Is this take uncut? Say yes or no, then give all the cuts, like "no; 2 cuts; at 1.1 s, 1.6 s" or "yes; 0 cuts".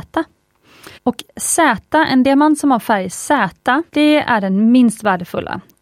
no; 2 cuts; at 0.9 s, 3.9 s